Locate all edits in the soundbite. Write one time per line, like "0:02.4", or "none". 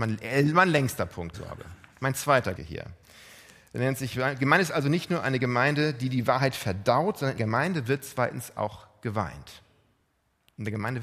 0:01.3
0:02.6
0:07.4